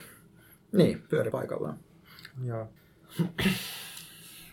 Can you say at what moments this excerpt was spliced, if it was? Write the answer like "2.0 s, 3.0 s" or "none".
1.3 s, 2.8 s

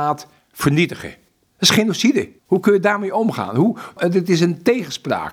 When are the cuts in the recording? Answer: 2.4 s

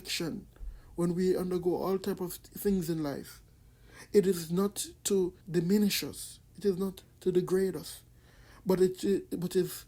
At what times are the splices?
5.4 s

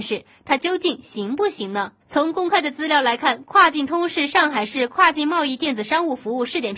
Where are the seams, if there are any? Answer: 2.0 s

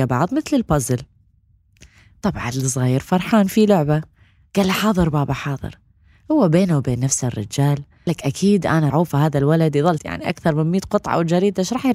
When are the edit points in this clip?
2.5 s, 8.1 s, 8.9 s, 10.0 s

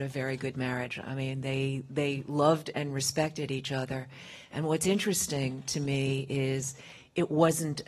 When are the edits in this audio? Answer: none

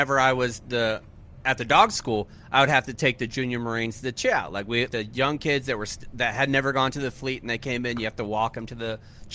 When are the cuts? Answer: 4.9 s

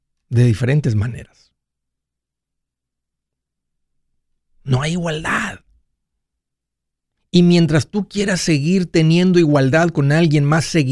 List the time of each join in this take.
none

